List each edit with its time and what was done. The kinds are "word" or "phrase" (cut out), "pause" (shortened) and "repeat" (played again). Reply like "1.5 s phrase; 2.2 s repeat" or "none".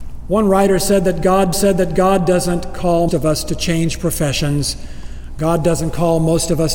1.5 s repeat; 3.1 s word